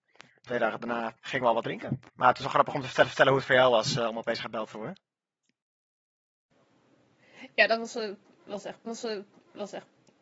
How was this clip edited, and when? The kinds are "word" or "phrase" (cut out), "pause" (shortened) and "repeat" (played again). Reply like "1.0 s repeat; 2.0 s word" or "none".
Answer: 1.2 s pause; 2.1 s pause; 3.0 s repeat; 8.9 s repeat